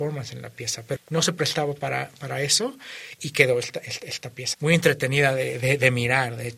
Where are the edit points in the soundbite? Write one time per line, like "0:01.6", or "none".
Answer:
0:01.0
0:04.5